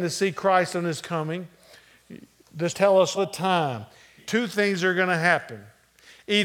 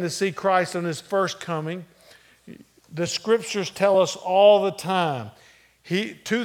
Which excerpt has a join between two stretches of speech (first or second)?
first